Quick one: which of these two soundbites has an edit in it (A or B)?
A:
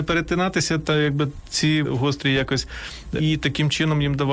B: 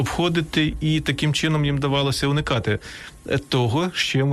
A